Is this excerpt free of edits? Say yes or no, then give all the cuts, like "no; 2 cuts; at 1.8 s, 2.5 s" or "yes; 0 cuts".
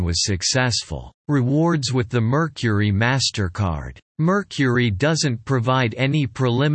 no; 2 cuts; at 1.2 s, 4.1 s